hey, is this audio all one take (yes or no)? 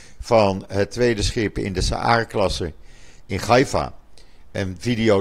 yes